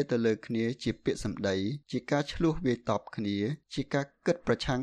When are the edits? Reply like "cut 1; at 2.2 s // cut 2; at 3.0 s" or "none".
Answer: cut 1; at 1.8 s // cut 2; at 3.6 s